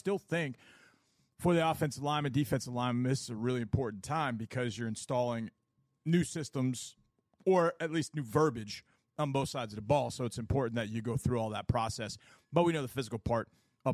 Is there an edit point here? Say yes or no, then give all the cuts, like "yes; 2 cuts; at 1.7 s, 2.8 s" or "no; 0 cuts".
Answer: no; 0 cuts